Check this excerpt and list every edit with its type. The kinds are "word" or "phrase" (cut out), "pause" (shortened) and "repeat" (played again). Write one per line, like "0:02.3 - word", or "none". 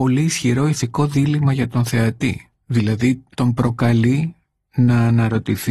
none